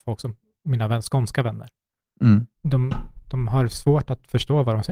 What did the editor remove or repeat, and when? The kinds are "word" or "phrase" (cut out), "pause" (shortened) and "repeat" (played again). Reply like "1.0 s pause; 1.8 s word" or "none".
2.6 s pause